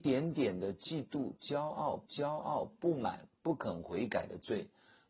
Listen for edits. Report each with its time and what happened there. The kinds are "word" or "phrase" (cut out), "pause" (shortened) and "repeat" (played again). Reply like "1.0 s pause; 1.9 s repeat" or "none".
2.1 s repeat